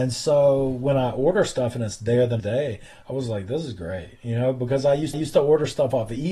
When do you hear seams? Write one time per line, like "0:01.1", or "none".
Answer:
0:02.4
0:05.1